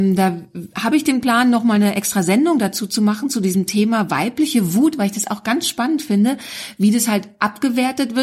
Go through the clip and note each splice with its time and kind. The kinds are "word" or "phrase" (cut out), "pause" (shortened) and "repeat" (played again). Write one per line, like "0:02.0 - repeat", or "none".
none